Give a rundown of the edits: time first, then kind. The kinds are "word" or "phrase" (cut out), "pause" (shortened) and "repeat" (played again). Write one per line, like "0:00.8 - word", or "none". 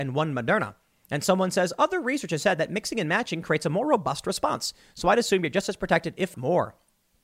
0:06.3 - word